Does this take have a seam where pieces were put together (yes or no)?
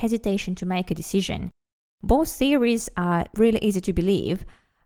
no